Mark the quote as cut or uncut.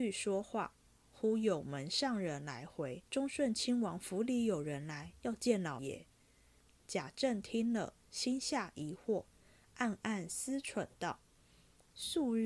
cut